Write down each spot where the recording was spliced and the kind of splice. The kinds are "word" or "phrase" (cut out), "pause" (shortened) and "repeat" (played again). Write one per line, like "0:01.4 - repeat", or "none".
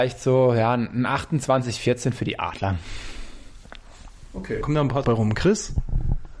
0:04.6 - word
0:05.0 - word